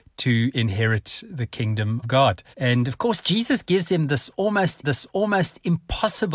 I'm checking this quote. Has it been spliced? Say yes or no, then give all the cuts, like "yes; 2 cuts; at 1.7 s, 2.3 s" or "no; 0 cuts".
yes; 3 cuts; at 2.0 s, 2.5 s, 4.8 s